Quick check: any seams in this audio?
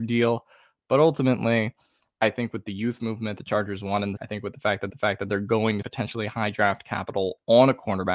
yes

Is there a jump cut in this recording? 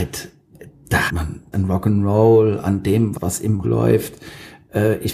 yes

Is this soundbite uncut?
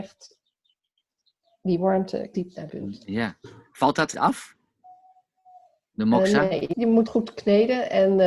no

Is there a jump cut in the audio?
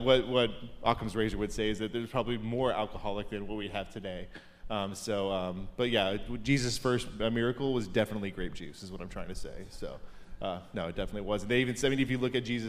no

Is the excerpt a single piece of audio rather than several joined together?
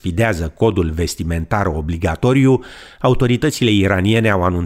yes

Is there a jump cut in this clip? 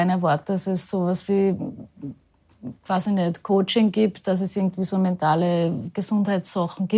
no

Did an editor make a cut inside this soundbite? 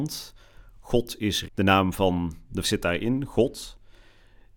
yes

